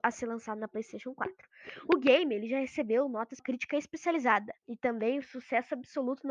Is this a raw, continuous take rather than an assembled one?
no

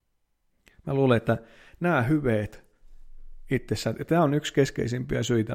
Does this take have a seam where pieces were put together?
no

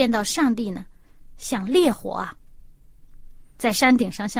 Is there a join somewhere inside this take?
no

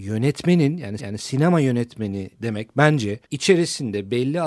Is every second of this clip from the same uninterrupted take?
no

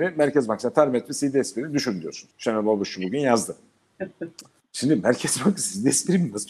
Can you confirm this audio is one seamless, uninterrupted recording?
yes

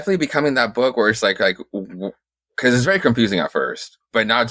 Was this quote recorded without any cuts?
yes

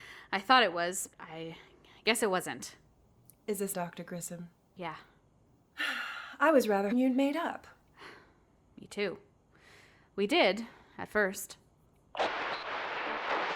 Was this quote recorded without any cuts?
no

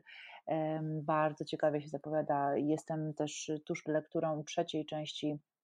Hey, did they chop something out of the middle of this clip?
yes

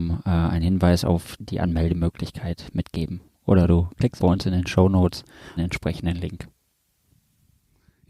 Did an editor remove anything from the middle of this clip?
yes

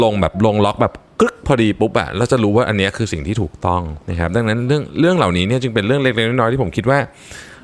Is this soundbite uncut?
no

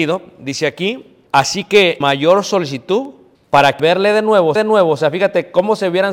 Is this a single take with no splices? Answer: no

